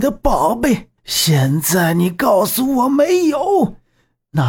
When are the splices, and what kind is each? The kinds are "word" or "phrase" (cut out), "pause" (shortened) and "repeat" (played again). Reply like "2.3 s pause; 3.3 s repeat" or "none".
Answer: 1.0 s pause